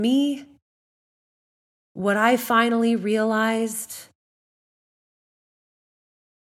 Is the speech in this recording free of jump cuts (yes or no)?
yes